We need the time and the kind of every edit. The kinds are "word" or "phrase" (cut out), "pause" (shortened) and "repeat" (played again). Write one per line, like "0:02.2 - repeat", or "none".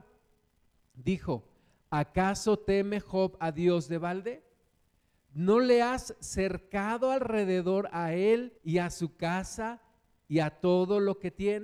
0:08.6 - pause